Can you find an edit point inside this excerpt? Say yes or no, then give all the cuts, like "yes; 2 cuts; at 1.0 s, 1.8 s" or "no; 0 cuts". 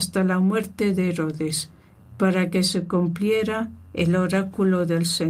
no; 0 cuts